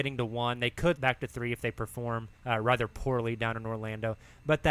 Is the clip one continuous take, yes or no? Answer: no